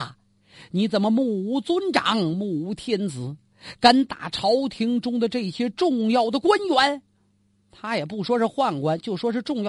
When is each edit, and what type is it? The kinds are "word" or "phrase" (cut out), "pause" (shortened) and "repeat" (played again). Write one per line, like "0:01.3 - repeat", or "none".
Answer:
none